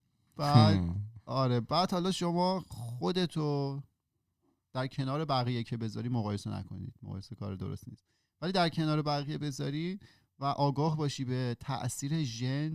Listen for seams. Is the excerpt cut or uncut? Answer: uncut